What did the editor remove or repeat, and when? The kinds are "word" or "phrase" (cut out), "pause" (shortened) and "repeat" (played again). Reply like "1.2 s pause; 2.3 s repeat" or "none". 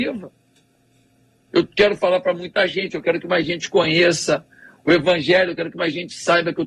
none